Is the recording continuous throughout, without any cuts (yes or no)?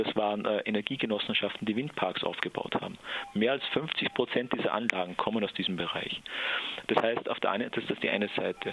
yes